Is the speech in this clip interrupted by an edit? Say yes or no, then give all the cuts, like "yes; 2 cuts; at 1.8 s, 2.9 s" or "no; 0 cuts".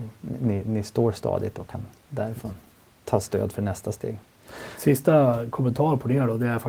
no; 0 cuts